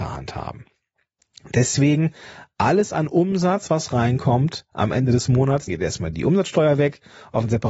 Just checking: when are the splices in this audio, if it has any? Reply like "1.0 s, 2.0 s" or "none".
5.7 s